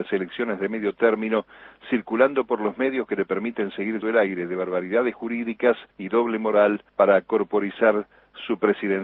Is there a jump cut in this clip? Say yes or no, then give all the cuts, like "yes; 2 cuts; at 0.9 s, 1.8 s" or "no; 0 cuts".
yes; 3 cuts; at 4.0 s, 5.9 s, 6.9 s